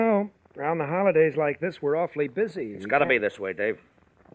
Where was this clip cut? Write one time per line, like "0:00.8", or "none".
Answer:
none